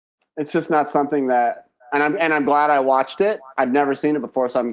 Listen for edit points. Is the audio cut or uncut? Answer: uncut